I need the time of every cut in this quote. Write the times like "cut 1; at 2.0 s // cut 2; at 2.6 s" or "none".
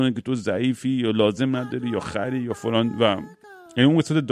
none